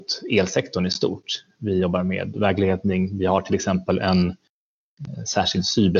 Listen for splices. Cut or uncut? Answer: uncut